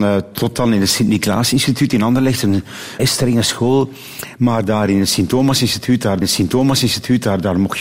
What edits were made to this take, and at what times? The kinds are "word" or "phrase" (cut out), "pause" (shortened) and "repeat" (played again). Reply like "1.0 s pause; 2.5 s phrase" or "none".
3.0 s word; 6.2 s repeat